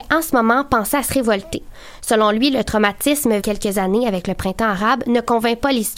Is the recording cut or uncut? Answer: cut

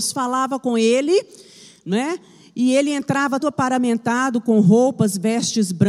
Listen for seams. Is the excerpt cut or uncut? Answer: cut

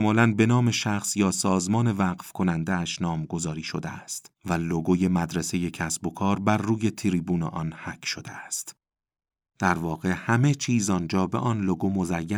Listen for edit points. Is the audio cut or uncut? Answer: cut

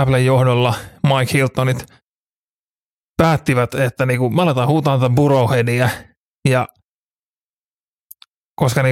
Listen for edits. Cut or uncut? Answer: uncut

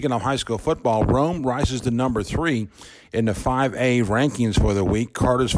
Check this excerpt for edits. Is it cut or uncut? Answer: uncut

